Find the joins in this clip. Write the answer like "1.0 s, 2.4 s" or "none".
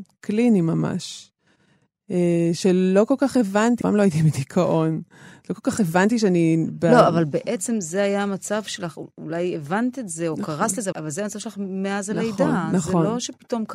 3.8 s, 10.9 s

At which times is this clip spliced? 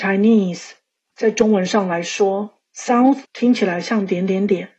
3.2 s

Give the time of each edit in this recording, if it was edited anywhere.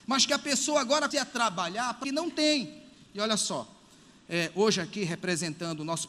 1.1 s, 2.0 s

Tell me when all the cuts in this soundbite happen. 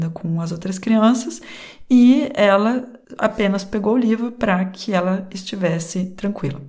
3.0 s

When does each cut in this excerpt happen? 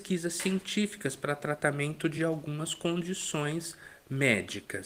none

